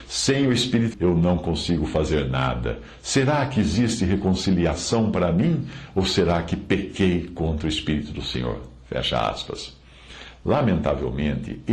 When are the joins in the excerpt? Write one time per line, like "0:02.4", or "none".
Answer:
0:00.9